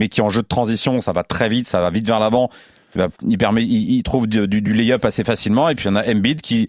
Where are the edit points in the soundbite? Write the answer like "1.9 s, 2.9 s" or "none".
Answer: 3.1 s